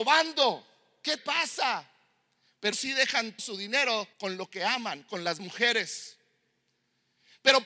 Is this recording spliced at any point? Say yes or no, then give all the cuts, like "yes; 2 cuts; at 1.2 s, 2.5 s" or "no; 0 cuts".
yes; 5 cuts; at 1.2 s, 2.7 s, 3.4 s, 4.1 s, 5.4 s